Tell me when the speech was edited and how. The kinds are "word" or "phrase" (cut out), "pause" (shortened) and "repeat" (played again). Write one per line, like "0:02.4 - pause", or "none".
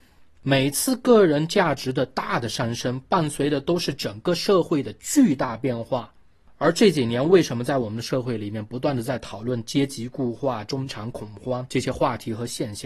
none

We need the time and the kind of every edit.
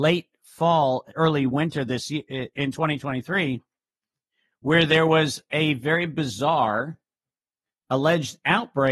none

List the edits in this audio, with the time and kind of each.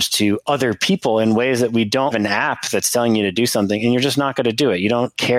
0:02.1 - phrase

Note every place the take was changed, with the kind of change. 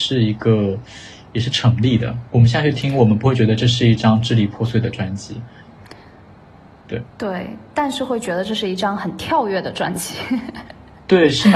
0:02.3 - pause

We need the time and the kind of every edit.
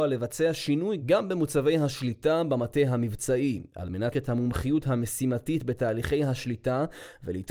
0:04.1 - word

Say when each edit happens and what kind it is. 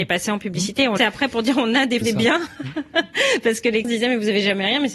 0:01.0 - phrase
0:02.0 - word
0:03.8 - word

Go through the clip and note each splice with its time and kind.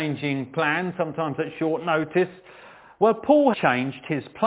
0:03.5 - word

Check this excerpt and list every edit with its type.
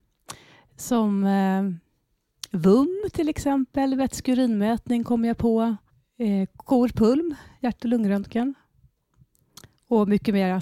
0:05.9 - pause

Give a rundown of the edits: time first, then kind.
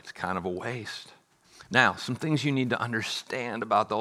0:01.4 - pause

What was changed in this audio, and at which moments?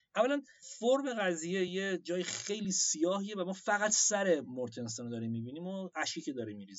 none

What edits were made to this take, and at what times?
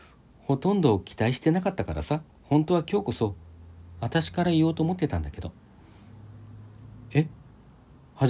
0:02.3 - pause

